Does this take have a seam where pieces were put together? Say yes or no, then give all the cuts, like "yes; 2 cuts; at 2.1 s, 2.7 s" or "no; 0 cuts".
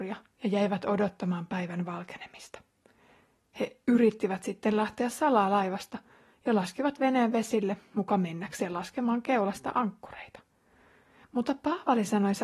no; 0 cuts